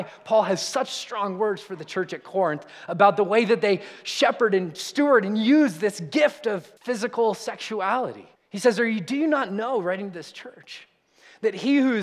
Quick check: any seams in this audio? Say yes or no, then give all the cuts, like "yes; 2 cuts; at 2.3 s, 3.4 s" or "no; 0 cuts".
yes; 2 cuts; at 6.8 s, 8.3 s